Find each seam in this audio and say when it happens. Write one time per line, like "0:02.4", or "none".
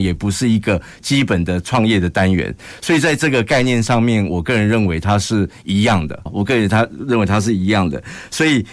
0:06.3